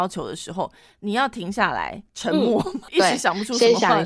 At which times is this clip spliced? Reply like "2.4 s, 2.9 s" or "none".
2.1 s